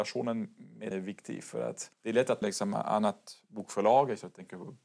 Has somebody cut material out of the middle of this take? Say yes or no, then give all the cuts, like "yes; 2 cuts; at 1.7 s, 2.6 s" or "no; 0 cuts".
yes; 3 cuts; at 0.9 s, 1.9 s, 2.4 s